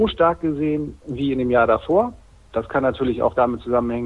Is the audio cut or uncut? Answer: uncut